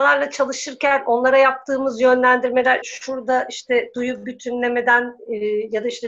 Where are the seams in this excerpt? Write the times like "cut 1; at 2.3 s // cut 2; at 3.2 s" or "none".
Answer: cut 1; at 2.8 s